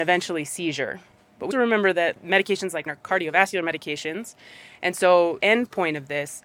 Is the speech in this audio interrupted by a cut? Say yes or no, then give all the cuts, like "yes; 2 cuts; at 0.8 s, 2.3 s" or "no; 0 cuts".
yes; 4 cuts; at 1.5 s, 2.2 s, 2.9 s, 5.4 s